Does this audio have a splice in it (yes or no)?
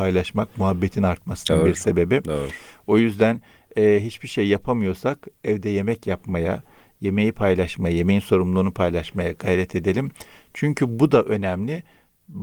no